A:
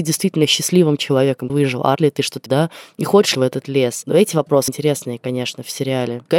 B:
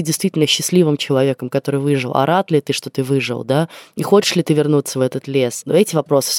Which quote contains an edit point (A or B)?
A